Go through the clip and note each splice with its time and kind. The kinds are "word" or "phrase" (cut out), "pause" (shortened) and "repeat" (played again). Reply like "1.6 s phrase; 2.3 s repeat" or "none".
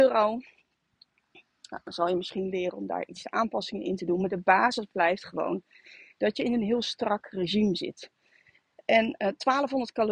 none